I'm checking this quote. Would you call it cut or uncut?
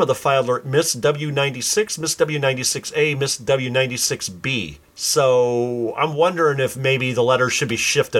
cut